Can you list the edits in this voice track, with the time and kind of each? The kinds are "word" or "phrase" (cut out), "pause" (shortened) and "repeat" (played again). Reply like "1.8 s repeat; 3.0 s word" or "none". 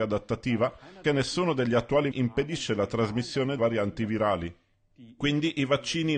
1.0 s word; 2.1 s word; 3.6 s word